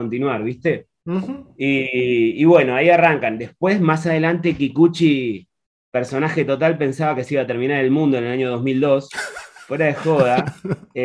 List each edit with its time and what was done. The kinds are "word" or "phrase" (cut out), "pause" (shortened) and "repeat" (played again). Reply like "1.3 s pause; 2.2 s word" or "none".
none